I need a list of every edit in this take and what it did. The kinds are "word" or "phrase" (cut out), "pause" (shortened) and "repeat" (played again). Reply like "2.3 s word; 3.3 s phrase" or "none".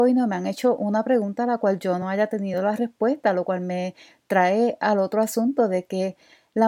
none